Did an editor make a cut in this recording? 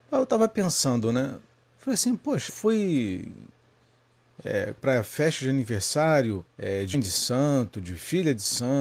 yes; 5 cuts; at 1.6 s, 2.5 s, 4.8 s, 6.5 s, 6.9 s

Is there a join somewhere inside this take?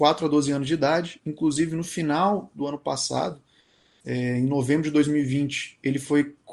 no; 0 cuts

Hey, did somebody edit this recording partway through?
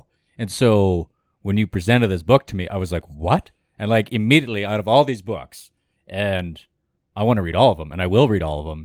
no; 0 cuts

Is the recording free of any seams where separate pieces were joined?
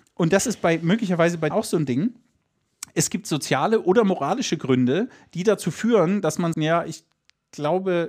no; 2 cuts; at 1.5 s, 6.5 s

